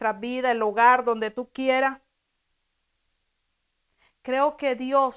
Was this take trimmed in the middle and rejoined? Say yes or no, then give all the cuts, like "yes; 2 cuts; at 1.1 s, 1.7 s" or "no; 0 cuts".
no; 0 cuts